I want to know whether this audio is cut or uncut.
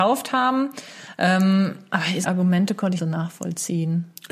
cut